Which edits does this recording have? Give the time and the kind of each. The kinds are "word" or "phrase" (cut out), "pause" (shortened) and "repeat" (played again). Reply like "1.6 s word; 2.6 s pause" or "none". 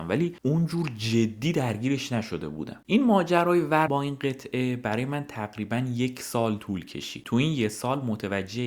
3.9 s word